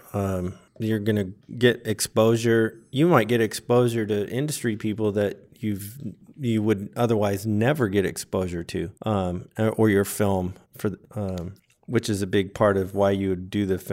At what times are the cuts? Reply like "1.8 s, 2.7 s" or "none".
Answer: 9.0 s, 11.0 s